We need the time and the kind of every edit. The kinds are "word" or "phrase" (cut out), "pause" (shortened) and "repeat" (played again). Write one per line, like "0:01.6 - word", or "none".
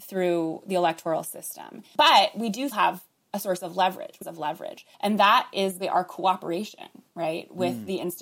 0:02.7 - word
0:04.2 - phrase
0:04.9 - pause
0:05.8 - word